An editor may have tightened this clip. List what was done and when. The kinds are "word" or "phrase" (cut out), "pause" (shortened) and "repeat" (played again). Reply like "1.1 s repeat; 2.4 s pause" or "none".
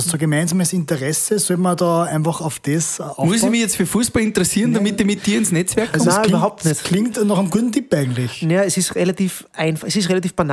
none